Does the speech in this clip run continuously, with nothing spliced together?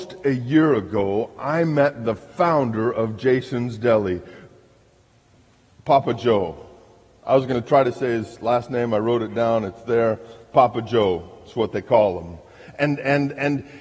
yes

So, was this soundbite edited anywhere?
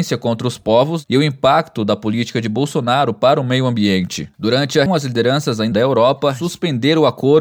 yes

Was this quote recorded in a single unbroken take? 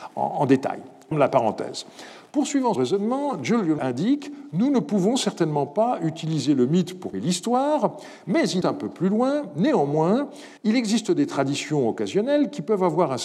no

